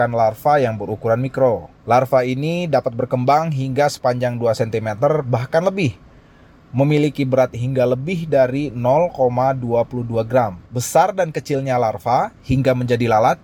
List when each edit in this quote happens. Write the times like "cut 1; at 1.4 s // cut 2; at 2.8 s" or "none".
cut 1; at 1.8 s // cut 2; at 10.7 s